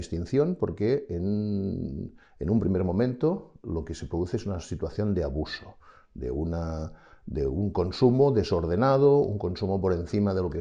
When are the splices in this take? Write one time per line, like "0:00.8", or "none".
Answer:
none